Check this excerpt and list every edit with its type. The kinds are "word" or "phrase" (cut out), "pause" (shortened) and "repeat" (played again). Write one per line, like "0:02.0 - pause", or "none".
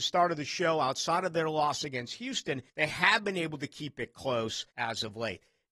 0:02.7 - pause
0:04.7 - pause

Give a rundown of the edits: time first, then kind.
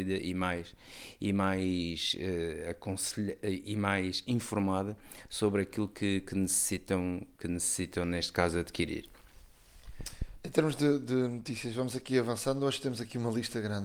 none

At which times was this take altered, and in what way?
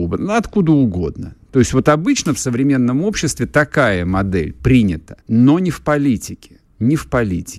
0:05.2 - pause
0:06.7 - pause

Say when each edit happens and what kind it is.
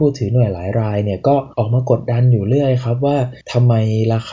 0:01.5 - pause
0:03.4 - pause

